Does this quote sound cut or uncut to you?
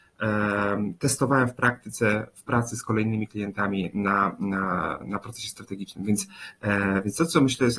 uncut